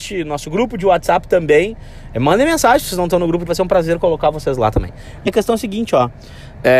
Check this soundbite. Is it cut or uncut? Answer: cut